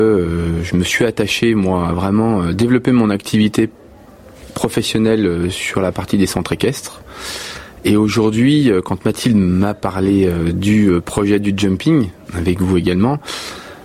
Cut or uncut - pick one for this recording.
uncut